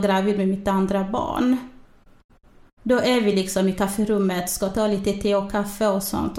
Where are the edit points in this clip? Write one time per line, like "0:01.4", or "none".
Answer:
none